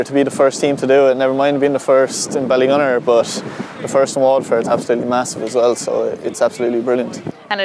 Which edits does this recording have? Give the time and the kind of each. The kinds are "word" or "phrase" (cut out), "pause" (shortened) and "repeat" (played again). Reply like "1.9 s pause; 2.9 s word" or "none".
none

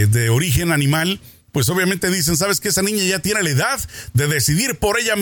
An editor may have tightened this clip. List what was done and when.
none

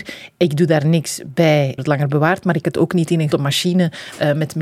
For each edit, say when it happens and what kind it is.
1.8 s word; 2.6 s word; 3.3 s word

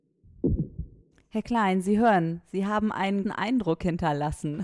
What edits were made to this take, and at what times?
3.2 s word

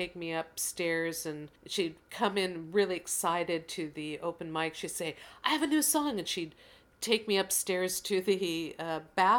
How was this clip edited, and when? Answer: 1.6 s pause

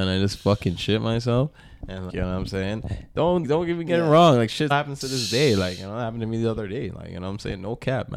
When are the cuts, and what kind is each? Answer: 2.1 s word; 3.4 s word; 4.7 s word

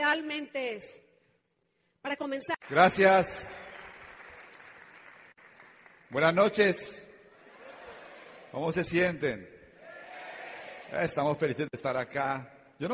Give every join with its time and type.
none

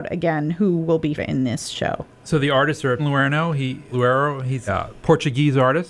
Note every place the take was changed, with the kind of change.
1.2 s word; 3.0 s word; 3.9 s word; 4.7 s word

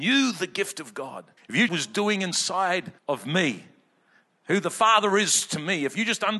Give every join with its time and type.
1.4 s pause; 1.7 s phrase; 3.0 s pause

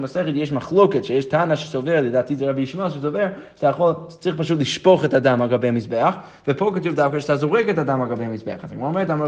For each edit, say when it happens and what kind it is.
none

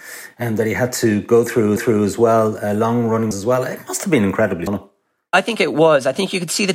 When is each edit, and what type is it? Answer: 1.8 s repeat; 3.3 s word; 4.7 s word

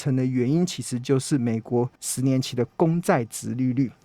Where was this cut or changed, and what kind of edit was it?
1.9 s pause

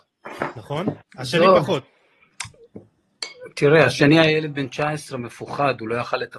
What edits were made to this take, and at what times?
1.1 s pause

